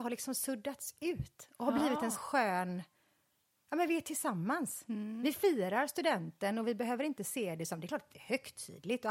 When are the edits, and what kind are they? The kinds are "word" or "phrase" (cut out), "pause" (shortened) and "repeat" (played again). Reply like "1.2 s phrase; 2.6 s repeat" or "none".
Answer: 2.1 s word